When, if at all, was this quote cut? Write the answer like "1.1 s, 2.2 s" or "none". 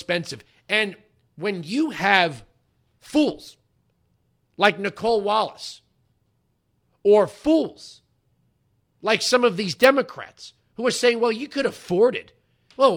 none